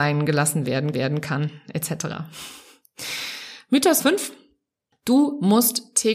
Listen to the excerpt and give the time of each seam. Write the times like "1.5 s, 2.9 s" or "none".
0.9 s, 4.0 s